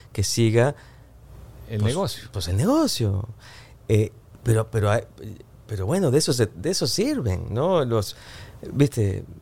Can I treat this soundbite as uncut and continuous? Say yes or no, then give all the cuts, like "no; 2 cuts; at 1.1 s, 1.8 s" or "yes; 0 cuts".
yes; 0 cuts